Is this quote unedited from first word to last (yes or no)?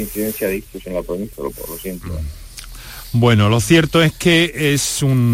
no